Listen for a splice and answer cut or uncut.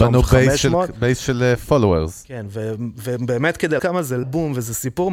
cut